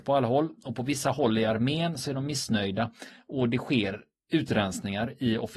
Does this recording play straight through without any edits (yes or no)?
yes